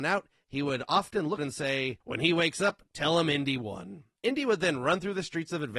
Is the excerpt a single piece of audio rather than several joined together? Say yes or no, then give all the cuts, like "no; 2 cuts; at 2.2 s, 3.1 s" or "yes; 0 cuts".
no; 3 cuts; at 1.4 s, 2.0 s, 4.2 s